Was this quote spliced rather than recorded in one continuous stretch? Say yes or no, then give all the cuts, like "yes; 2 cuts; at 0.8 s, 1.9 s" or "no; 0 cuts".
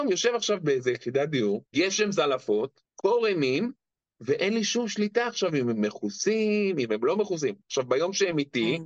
yes; 1 cut; at 1.7 s